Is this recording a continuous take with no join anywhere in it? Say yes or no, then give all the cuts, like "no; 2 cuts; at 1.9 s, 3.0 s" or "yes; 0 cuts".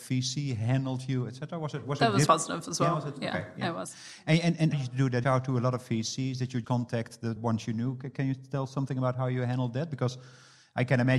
no; 5 cuts; at 2.3 s, 4.7 s, 5.2 s, 6.6 s, 7.4 s